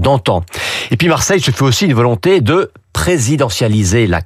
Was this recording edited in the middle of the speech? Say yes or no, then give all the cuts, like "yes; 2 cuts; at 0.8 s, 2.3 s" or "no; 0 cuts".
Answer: no; 0 cuts